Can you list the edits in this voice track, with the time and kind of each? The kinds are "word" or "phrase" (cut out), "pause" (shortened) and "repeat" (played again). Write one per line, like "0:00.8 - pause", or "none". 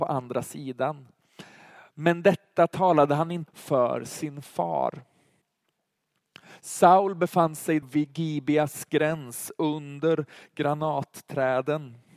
0:03.5 - word
0:07.8 - word